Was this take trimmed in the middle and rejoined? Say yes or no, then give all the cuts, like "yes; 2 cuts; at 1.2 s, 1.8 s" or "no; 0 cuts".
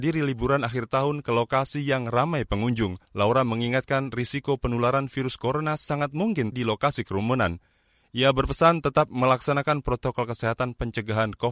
yes; 2 cuts; at 3.0 s, 6.5 s